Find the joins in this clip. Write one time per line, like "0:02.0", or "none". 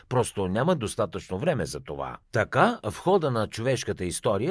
0:02.2